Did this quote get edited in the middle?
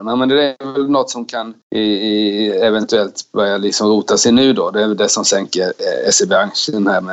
yes; 1 cut; at 1.6 s

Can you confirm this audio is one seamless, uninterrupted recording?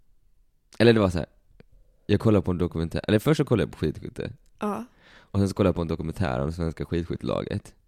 yes; 0 cuts

